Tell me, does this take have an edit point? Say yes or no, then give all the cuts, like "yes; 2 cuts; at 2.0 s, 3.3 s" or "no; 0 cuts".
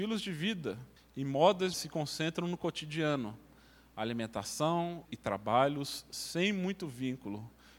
yes; 3 cuts; at 1.0 s, 1.7 s, 5.0 s